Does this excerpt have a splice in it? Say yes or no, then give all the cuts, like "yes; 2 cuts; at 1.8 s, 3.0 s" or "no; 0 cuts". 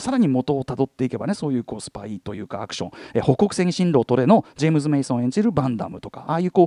no; 0 cuts